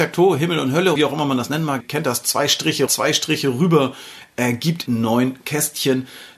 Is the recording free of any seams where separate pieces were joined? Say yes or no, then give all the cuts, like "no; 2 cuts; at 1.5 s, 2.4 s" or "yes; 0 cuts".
no; 4 cuts; at 0.9 s, 1.8 s, 2.9 s, 4.9 s